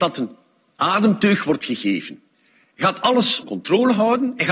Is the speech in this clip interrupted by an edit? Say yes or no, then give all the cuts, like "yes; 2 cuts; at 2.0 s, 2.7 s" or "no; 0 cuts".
yes; 1 cut; at 3.4 s